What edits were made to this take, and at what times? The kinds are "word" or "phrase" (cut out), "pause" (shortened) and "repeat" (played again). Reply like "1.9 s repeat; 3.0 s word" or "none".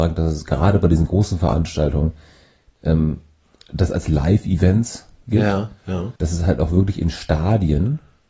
6.2 s pause